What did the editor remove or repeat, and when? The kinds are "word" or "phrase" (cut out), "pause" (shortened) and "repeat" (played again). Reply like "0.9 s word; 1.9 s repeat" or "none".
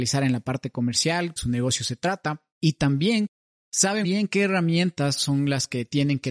1.4 s phrase; 2.5 s pause; 4.0 s word